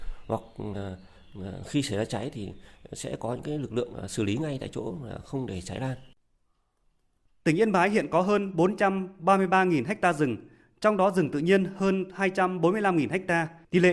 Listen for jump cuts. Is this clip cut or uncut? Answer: uncut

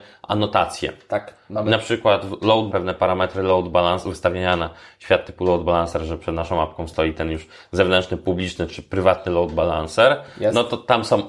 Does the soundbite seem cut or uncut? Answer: cut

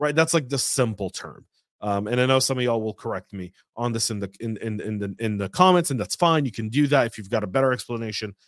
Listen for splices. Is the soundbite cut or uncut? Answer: uncut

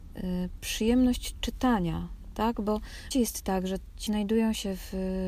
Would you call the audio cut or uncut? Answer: cut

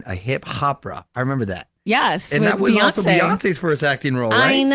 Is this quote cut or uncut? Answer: uncut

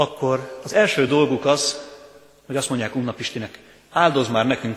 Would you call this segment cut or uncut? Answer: uncut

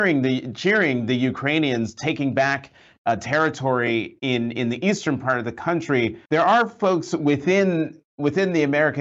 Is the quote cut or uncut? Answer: cut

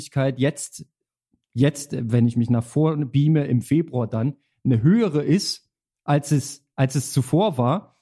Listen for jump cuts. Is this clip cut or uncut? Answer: uncut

